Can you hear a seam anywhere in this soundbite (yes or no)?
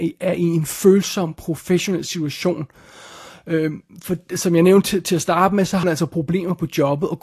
yes